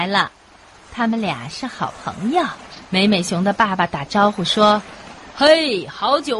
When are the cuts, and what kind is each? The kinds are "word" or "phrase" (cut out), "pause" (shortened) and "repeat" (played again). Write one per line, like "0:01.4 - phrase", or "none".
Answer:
0:02.9 - pause